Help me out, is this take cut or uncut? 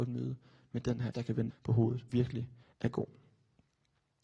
cut